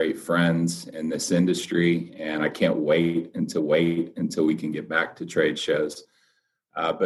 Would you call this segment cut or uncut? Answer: cut